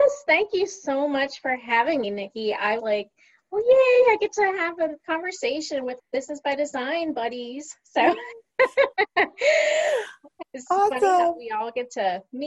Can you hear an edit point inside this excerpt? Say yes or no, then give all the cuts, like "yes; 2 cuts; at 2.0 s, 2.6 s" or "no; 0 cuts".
yes; 4 cuts; at 2.0 s, 2.8 s, 5.0 s, 6.0 s